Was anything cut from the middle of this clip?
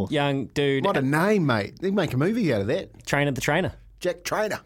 no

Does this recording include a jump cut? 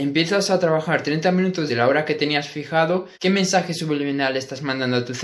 yes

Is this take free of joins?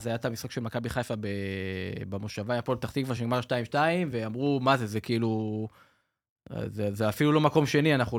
yes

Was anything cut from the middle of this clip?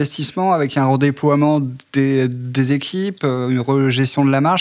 no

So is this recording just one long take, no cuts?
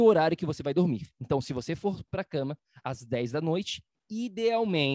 yes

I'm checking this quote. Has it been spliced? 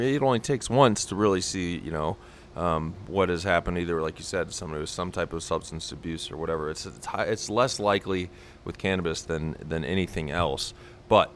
no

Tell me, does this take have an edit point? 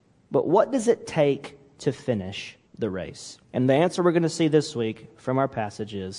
yes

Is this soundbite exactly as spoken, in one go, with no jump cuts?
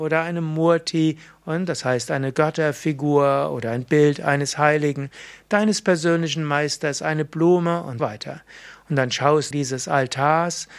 no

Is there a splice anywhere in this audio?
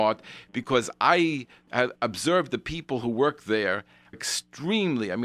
yes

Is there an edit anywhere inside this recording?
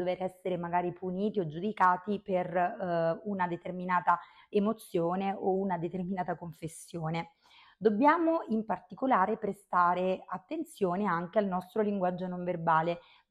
no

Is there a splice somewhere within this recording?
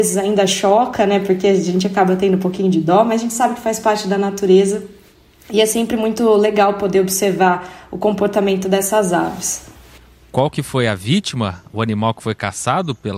no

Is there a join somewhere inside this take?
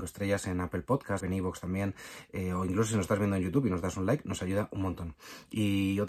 yes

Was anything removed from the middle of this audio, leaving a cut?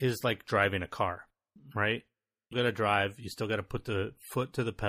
yes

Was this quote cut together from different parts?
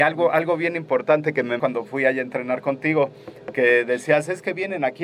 yes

